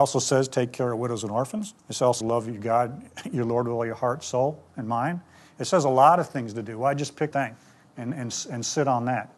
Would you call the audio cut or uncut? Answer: cut